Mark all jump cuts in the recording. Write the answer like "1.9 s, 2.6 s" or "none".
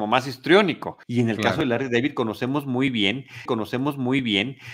1.0 s, 3.5 s

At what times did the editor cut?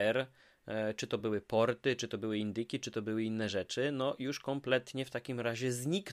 none

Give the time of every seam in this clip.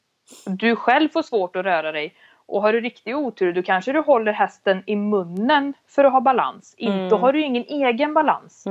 none

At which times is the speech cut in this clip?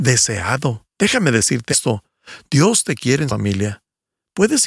0.9 s, 1.7 s, 3.3 s

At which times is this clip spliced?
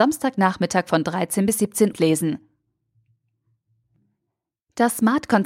1.9 s

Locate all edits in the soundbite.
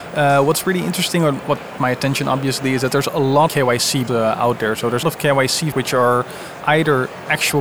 1.8 s, 3.5 s, 4.1 s, 5.0 s, 5.7 s, 6.6 s

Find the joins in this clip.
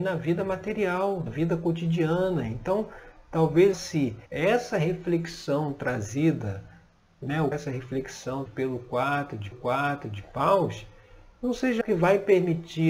1.3 s, 3.7 s, 4.3 s, 7.5 s, 8.5 s, 9.5 s, 11.8 s

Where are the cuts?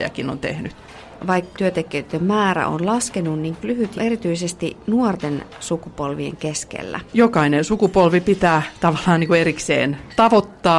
1.5 s, 3.6 s, 4.0 s, 7.1 s

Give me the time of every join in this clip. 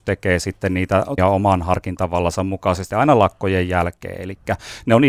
1.2 s, 2.9 s

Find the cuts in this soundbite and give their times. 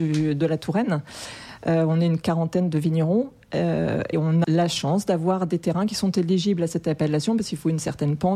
4.1 s, 4.4 s

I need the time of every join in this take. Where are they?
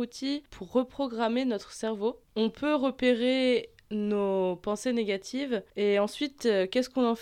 2.3 s, 5.7 s

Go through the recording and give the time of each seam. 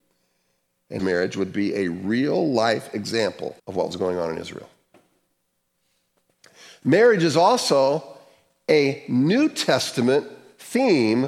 1.0 s, 3.6 s

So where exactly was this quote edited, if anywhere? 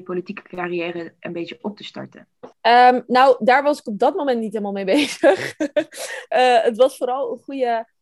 2.5 s, 6.3 s

